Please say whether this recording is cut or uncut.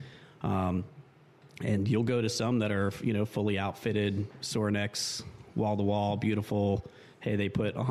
uncut